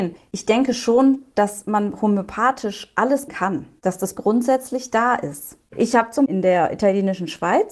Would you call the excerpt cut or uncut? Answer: cut